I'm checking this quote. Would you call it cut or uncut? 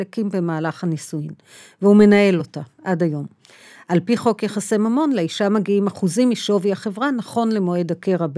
uncut